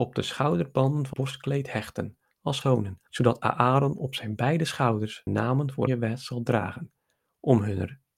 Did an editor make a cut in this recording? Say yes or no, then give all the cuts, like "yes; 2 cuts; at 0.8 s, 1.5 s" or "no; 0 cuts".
yes; 5 cuts; at 1.1 s, 2.6 s, 3.1 s, 5.3 s, 5.9 s